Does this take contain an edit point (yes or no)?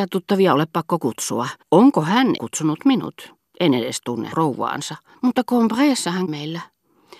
yes